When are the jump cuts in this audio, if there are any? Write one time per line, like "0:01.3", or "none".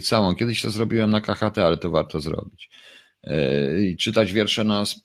none